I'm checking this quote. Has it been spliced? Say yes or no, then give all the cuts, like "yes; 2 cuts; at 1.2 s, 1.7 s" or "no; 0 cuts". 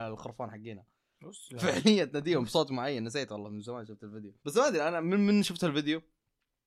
yes; 1 cut; at 4.4 s